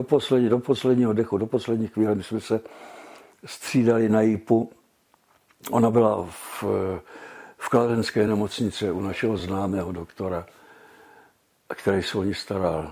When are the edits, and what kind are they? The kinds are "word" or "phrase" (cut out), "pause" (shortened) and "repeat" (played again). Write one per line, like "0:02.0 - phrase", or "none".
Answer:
none